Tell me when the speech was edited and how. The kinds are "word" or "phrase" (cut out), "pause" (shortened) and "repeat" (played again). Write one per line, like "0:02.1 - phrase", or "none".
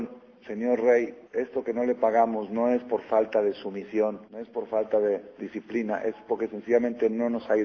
0:01.2 - pause
0:04.3 - pause